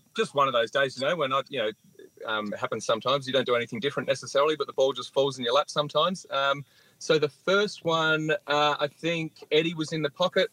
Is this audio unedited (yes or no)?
yes